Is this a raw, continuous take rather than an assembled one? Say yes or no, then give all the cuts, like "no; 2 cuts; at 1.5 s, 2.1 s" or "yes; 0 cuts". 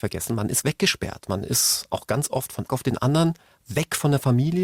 no; 1 cut; at 2.7 s